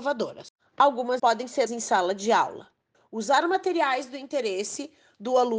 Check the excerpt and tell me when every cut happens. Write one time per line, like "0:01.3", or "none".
0:01.2
0:01.7
0:02.9